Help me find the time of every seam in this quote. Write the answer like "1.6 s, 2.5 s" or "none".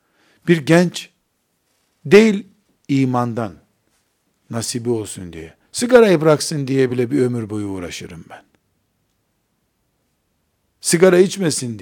none

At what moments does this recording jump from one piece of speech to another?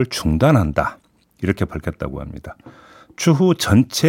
none

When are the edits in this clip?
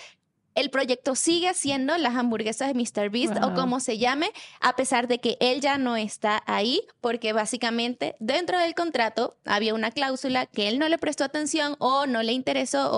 none

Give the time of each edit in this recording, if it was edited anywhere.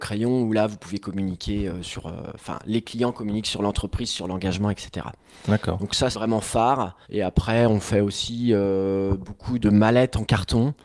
6.1 s, 7.0 s, 9.6 s

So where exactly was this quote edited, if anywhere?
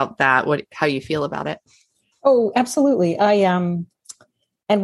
none

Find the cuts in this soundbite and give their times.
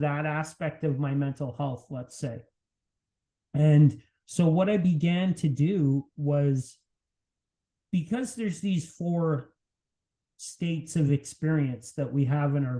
none

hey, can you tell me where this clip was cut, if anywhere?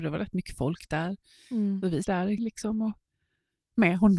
2.0 s, 2.4 s

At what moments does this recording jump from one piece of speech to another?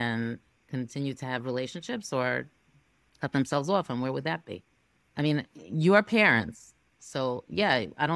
none

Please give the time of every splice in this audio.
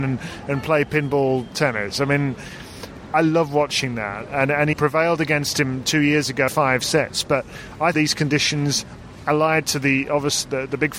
3.1 s, 4.7 s, 6.5 s, 7.9 s

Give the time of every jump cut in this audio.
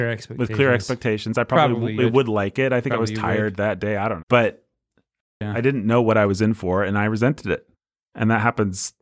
2.0 s, 4.2 s

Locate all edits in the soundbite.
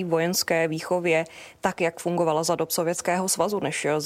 none

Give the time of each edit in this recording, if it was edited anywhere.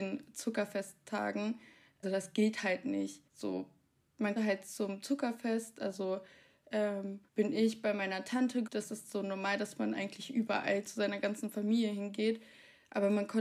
2.0 s, 3.3 s, 4.4 s, 7.3 s, 8.7 s

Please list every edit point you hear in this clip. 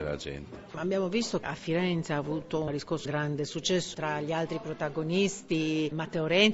1.4 s, 3.0 s, 3.9 s

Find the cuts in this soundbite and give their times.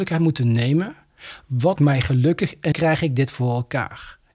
1.8 s, 2.7 s

